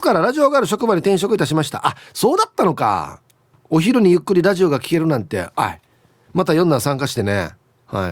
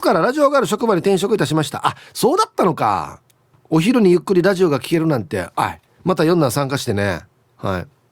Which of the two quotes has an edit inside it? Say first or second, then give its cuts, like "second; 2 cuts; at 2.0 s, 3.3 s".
second; 1 cut; at 5.9 s